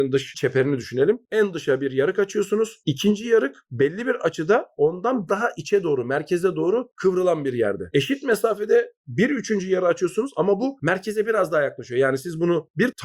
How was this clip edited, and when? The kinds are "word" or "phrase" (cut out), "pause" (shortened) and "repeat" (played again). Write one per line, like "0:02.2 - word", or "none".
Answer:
0:05.3 - word

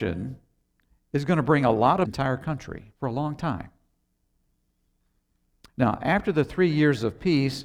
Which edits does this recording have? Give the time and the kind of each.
0:02.1 - phrase
0:02.9 - pause

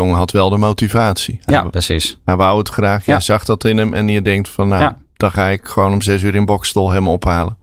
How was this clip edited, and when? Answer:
none

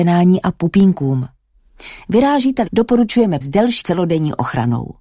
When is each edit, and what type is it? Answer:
0:02.7 - word
0:03.4 - word
0:03.8 - word

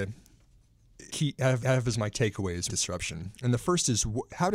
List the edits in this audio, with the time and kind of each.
0:01.1 - phrase
0:01.6 - repeat
0:02.1 - word
0:02.7 - phrase

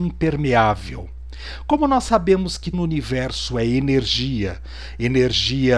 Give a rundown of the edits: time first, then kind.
0:02.7 - word

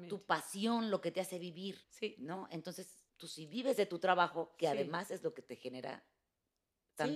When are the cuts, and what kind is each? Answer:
0:01.8 - pause
0:03.1 - pause

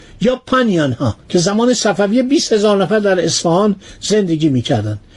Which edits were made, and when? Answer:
0:01.2 - pause

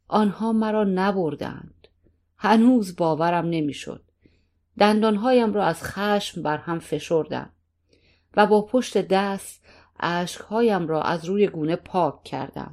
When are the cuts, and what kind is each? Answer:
none

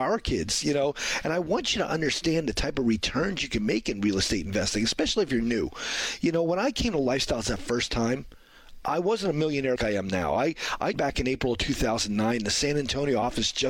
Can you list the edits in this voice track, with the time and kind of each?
0:09.8 - word
0:10.9 - word

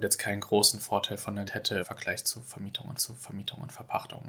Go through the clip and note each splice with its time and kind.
0:01.5 - word
0:01.8 - phrase
0:03.0 - repeat

